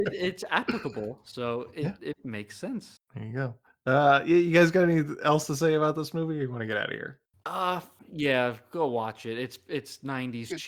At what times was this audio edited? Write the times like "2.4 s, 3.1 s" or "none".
none